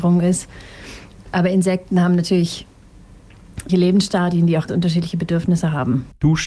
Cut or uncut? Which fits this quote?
cut